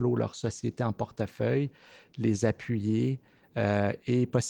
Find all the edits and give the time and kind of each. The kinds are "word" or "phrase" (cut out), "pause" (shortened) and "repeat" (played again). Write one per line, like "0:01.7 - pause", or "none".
none